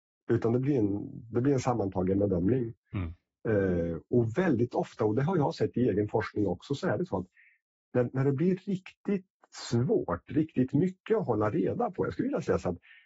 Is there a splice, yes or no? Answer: no